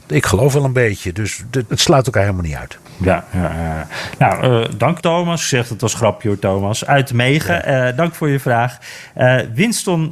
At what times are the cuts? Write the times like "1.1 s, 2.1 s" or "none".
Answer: 1.7 s, 2.9 s, 5.0 s